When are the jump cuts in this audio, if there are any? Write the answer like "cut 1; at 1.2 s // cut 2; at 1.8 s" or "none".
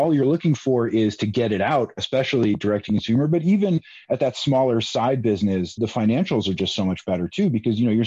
cut 1; at 5.8 s